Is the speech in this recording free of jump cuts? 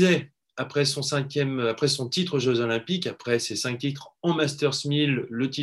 yes; 0 cuts

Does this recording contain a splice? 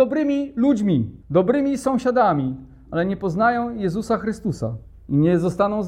yes; 2 cuts; at 1.2 s, 4.8 s

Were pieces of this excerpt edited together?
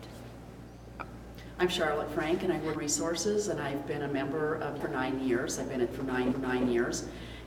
yes; 4 cuts; at 2.8 s, 4.8 s, 5.9 s, 6.3 s

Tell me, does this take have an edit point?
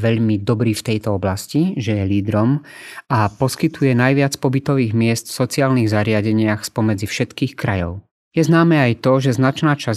no; 0 cuts

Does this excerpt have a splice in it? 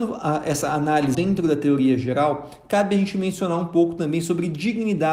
yes; 1 cut; at 1.1 s

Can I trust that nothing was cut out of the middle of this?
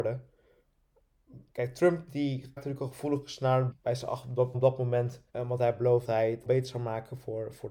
no; 7 cuts; at 1.5 s, 2.6 s, 3.7 s, 4.5 s, 5.3 s, 6.0 s, 6.4 s

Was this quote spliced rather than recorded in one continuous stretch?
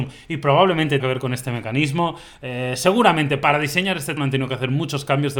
yes; 2 cuts; at 1.0 s, 4.2 s

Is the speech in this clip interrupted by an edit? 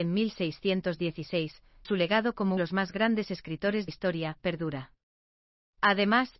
yes; 3 cuts; at 1.8 s, 2.6 s, 3.9 s

